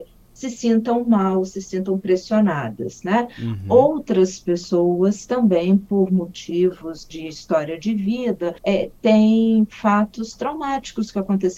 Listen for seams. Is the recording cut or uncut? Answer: cut